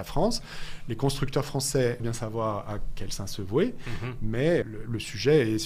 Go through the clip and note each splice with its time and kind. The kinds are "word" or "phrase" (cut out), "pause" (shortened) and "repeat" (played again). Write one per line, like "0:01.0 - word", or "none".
0:02.0 - word
0:04.6 - word